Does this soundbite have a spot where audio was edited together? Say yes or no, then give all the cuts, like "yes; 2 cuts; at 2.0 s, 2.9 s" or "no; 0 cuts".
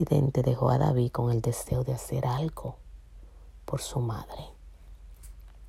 no; 0 cuts